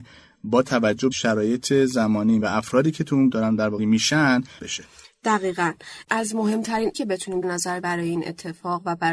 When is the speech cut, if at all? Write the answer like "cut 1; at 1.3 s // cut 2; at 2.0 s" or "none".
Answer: cut 1; at 1.1 s // cut 2; at 2.4 s // cut 3; at 3.3 s // cut 4; at 3.8 s // cut 5; at 4.6 s // cut 6; at 6.0 s // cut 7; at 6.9 s // cut 8; at 7.4 s // cut 9; at 7.8 s

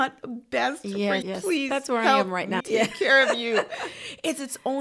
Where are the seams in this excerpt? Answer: cut 1; at 1.2 s // cut 2; at 2.6 s

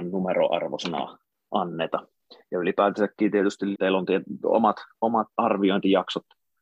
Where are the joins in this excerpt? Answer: cut 1; at 3.7 s // cut 2; at 5.3 s

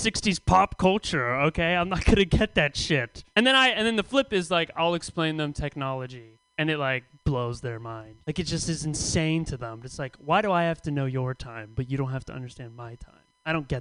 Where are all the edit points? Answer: cut 1; at 3.3 s // cut 2; at 6.5 s // cut 3; at 8.2 s

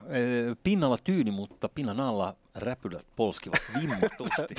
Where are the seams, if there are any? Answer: none

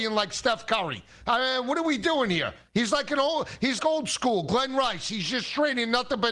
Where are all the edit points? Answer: cut 1; at 3.8 s

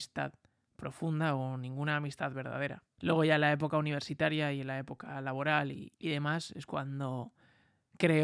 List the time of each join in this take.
cut 1; at 2.9 s

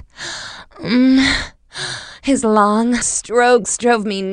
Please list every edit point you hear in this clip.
cut 1; at 3.0 s

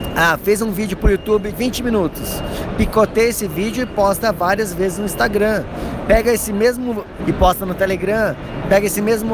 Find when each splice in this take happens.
cut 1; at 1.5 s // cut 2; at 7.2 s

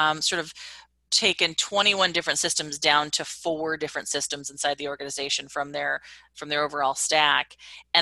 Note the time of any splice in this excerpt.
none

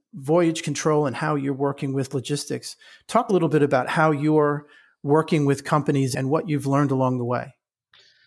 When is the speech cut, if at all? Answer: cut 1; at 3.3 s

